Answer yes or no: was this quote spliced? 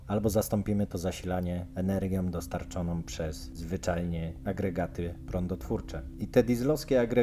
no